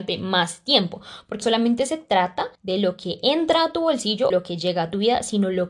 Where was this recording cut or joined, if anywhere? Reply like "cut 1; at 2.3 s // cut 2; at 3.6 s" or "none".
cut 1; at 1.4 s // cut 2; at 2.5 s // cut 3; at 4.3 s